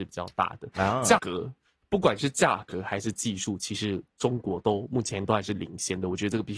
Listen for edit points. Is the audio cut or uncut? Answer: cut